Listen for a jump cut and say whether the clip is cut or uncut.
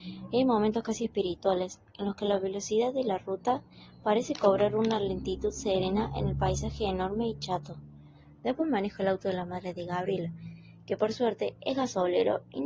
uncut